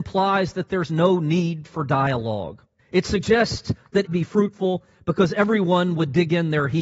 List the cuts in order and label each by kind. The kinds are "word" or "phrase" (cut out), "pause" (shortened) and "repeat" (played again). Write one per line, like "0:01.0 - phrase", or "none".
0:02.8 - pause
0:04.1 - phrase